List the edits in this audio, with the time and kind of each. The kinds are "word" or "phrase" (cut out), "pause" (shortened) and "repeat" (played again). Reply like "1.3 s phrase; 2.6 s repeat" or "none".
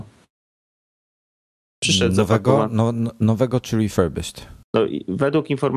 4.6 s pause